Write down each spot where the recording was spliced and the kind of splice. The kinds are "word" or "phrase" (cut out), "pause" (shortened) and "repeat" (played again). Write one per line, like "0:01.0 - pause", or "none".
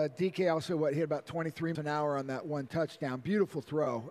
0:01.7 - word